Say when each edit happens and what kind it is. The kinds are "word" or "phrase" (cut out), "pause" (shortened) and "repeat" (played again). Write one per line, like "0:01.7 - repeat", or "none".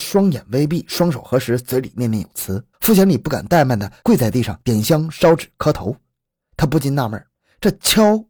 0:02.7 - pause